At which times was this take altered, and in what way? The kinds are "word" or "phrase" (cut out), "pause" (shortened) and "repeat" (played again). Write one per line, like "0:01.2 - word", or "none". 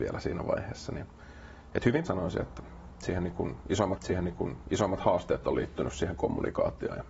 0:02.1 - word
0:04.0 - repeat